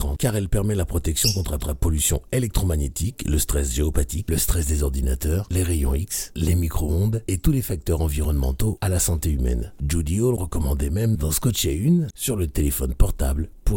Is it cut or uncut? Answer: cut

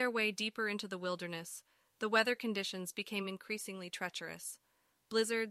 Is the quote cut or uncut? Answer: uncut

